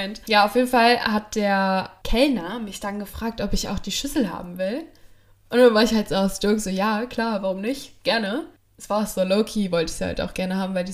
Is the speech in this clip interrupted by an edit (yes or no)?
no